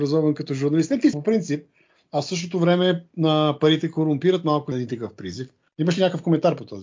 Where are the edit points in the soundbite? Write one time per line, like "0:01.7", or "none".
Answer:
0:01.1
0:04.7